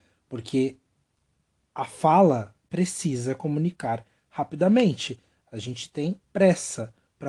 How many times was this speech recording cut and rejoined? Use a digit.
2